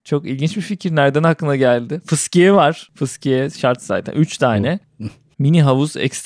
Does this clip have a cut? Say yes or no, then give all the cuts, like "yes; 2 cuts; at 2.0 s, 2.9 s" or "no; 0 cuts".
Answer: no; 0 cuts